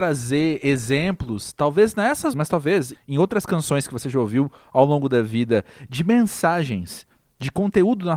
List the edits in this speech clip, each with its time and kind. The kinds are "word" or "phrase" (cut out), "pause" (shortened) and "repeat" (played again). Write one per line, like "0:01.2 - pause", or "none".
0:02.3 - word
0:02.9 - word